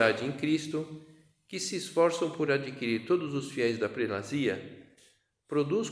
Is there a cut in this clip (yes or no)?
no